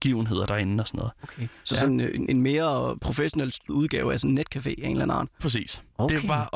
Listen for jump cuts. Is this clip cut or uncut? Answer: cut